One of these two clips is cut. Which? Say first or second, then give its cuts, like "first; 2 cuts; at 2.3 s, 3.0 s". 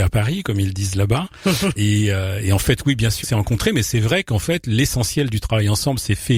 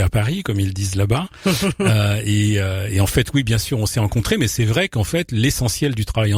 first; 2 cuts; at 1.8 s, 3.2 s